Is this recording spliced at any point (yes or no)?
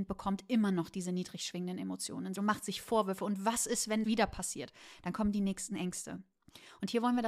yes